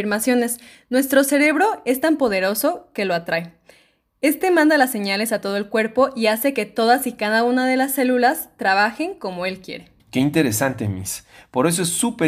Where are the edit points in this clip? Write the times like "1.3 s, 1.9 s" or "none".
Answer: 10.0 s